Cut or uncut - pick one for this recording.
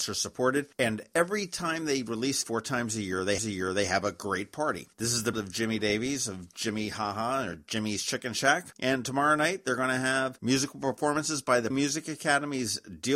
cut